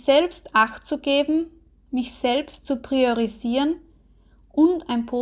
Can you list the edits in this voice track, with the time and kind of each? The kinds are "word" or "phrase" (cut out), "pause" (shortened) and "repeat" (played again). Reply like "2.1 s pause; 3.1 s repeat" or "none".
none